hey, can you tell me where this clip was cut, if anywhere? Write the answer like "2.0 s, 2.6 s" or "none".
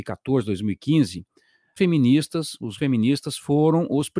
1.8 s, 2.8 s